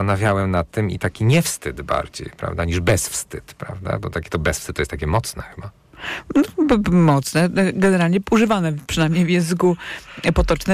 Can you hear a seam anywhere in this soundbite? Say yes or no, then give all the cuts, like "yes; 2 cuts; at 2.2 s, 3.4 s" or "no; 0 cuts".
no; 0 cuts